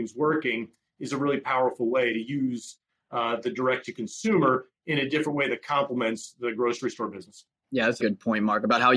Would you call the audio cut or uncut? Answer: cut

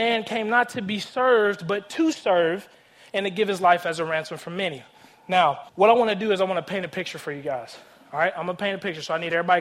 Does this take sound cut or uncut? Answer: cut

